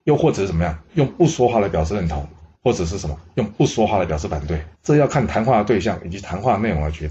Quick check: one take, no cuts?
no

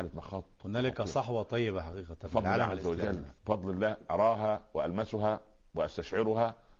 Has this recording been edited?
no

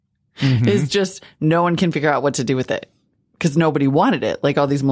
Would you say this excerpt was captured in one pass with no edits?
yes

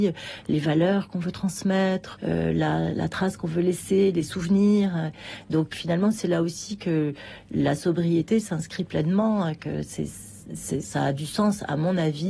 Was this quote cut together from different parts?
yes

